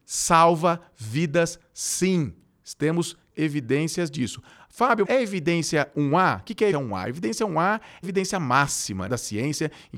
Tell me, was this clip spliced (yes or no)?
yes